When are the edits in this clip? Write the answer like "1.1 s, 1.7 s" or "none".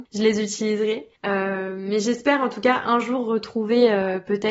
1.2 s